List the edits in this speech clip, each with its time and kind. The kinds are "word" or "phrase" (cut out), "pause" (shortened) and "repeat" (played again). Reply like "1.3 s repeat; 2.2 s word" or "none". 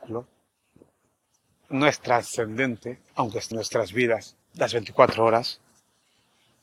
3.1 s pause; 3.5 s word; 4.4 s pause